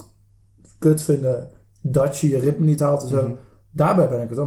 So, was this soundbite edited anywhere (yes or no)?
no